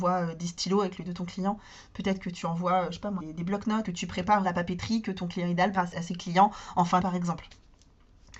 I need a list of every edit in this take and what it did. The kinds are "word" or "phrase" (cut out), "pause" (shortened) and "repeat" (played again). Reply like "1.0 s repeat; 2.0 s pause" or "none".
1.0 s word; 3.2 s word; 3.8 s word; 4.4 s word; 5.7 s word; 7.0 s word